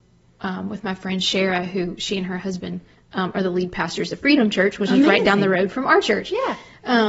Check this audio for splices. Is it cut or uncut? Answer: cut